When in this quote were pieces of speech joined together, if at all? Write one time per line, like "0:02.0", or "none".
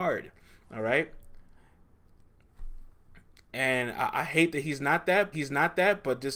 0:05.3

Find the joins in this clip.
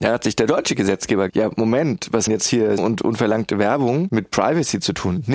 0:01.3
0:02.3
0:02.8

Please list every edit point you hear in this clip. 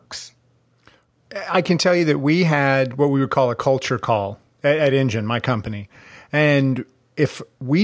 none

